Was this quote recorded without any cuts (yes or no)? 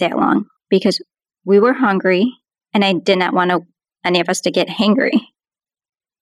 yes